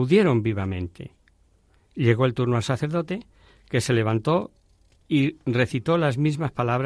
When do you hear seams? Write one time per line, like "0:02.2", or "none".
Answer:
none